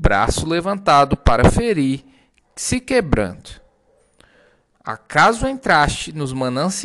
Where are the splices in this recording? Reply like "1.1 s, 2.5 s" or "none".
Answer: none